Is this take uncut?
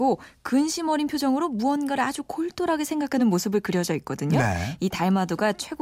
yes; 0 cuts

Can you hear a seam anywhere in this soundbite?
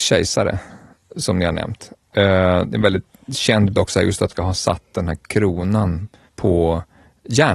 yes; 3 cuts; at 3.7 s, 4.3 s, 6.3 s

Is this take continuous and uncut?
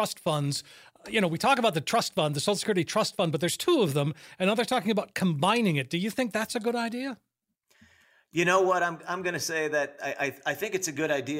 yes; 0 cuts

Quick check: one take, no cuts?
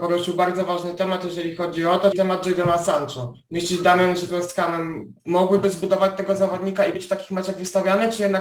no; 4 cuts; at 2.1 s, 4.3 s, 5.2 s, 6.9 s

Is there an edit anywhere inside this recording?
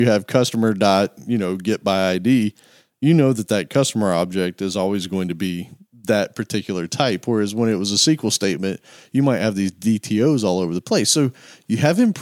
no; 0 cuts

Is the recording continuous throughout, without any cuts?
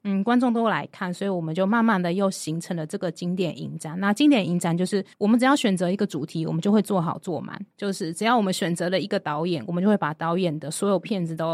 no; 2 cuts; at 5.1 s, 7.7 s

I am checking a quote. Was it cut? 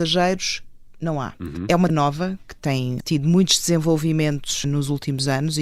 yes; 3 cuts; at 1.9 s, 3.0 s, 4.6 s

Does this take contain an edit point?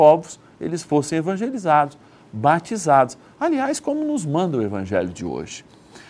no; 0 cuts

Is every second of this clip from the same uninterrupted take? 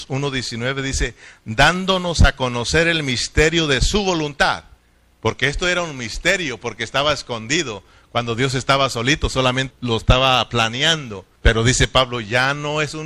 no; 2 cuts; at 9.7 s, 11.4 s

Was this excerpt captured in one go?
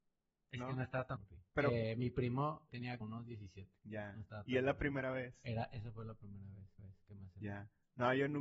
no; 6 cuts; at 1.2 s, 1.5 s, 2.7 s, 3.0 s, 3.8 s, 6.8 s

